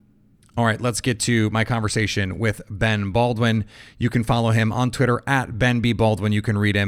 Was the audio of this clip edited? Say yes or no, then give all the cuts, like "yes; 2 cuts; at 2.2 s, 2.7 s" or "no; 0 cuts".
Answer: no; 0 cuts